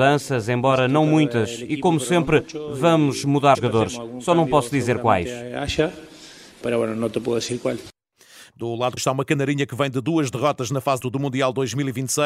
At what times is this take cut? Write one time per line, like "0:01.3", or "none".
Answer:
0:03.5
0:06.5
0:09.0
0:11.0